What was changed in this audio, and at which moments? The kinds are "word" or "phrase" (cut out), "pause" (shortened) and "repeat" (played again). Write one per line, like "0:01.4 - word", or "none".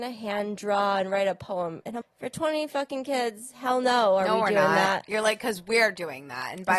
0:02.0 - word